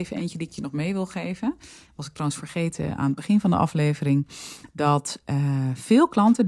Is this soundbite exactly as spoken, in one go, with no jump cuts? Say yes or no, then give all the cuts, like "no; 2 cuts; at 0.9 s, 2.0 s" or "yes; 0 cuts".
yes; 0 cuts